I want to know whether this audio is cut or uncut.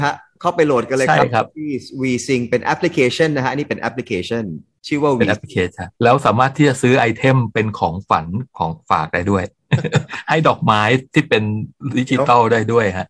cut